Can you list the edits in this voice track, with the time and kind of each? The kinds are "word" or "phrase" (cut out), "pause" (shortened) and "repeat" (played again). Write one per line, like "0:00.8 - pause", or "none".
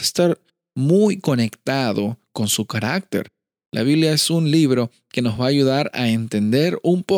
none